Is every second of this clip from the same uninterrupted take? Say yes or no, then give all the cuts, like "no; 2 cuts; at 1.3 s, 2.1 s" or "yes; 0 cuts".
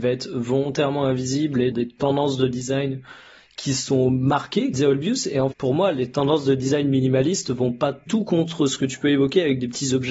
no; 4 cuts; at 1.7 s, 4.7 s, 5.5 s, 8.1 s